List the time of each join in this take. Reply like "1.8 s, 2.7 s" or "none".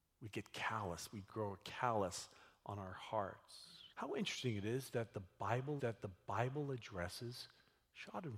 1.3 s, 3.9 s, 5.8 s